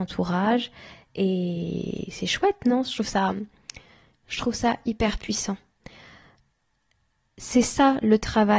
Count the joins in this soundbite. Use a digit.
0